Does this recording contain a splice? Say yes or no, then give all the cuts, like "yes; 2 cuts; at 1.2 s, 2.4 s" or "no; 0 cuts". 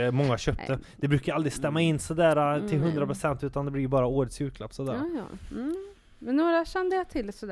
no; 0 cuts